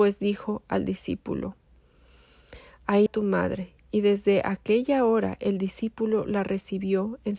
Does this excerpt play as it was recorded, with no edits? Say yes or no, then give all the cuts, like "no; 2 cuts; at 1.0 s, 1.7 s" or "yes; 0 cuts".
no; 1 cut; at 3.1 s